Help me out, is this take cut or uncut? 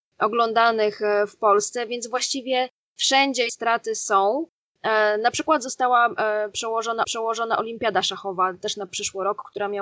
cut